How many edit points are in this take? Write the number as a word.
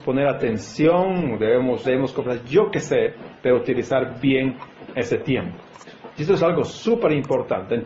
one